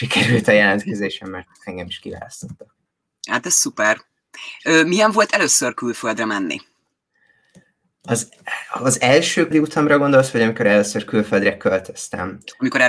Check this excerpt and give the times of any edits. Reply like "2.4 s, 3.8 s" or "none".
2.9 s, 9.5 s